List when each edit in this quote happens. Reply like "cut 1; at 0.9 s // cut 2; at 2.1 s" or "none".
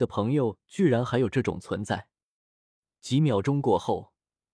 none